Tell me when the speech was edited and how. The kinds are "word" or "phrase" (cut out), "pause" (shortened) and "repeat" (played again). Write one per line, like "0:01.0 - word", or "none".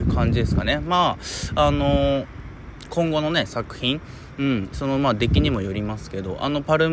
none